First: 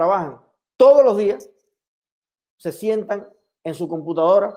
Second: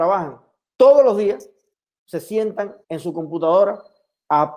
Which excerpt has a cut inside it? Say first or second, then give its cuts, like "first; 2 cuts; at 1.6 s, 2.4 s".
second; 2 cuts; at 1.7 s, 2.8 s